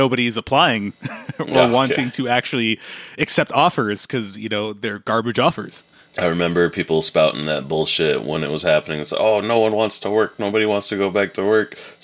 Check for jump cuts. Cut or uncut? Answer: uncut